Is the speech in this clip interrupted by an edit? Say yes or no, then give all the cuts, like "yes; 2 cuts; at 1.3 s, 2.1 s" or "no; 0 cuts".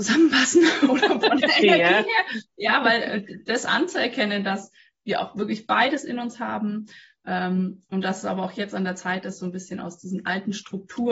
no; 0 cuts